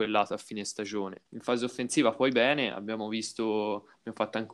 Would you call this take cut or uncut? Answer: cut